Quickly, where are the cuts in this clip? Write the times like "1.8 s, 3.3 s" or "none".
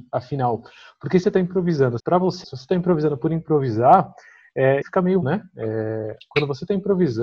1.2 s, 2.0 s, 2.4 s, 4.8 s, 5.2 s

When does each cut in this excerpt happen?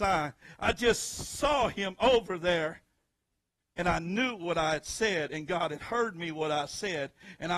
none

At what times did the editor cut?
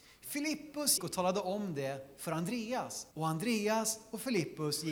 1.0 s, 3.1 s

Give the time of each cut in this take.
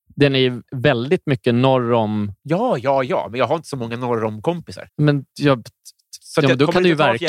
4.9 s

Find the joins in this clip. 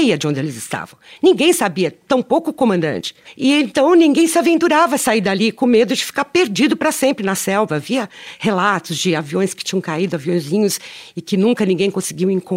none

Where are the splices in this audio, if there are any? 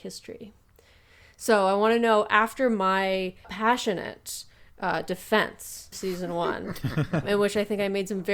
3.4 s, 5.9 s, 7.2 s

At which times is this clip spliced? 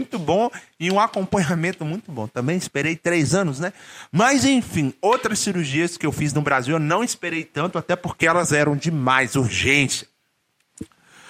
none

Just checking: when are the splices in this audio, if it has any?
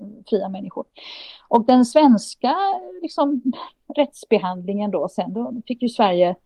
none

